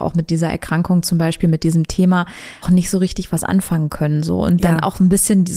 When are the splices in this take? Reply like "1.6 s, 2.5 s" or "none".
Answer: 2.6 s